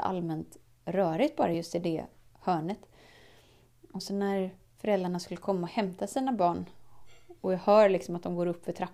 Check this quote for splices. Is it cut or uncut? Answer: uncut